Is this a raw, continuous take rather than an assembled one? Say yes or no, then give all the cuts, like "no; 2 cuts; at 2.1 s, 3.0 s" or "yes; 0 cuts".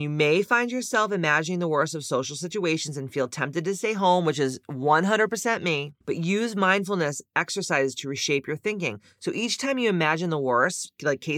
no; 1 cut; at 6.0 s